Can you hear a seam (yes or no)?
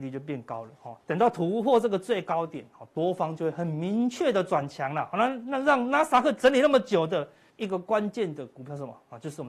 yes